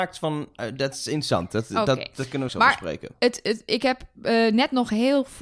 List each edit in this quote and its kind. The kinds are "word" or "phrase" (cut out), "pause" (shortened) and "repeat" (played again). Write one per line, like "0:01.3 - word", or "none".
0:02.5 - word